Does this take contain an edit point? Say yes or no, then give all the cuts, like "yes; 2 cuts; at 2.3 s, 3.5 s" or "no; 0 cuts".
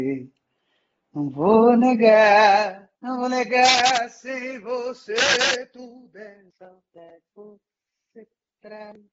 yes; 2 cuts; at 2.9 s, 7.3 s